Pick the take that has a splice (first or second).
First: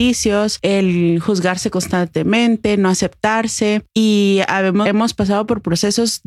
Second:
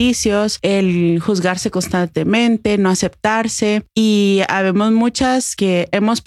first